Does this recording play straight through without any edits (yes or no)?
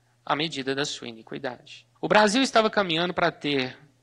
no